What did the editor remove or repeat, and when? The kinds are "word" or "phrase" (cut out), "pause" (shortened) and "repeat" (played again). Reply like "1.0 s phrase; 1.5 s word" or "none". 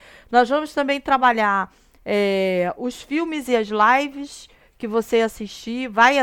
none